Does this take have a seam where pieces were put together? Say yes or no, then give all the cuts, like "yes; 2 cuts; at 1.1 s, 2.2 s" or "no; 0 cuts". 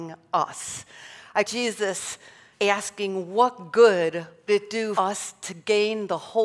yes; 4 cuts; at 1.4 s, 2.5 s, 4.5 s, 4.9 s